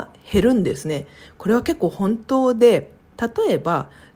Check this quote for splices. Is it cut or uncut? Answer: cut